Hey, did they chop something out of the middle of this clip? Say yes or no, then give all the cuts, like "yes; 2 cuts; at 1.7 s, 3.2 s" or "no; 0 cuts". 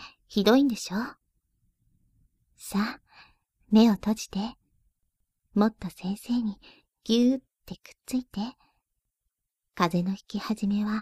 no; 0 cuts